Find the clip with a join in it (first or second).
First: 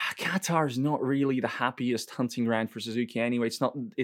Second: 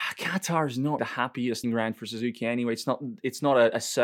second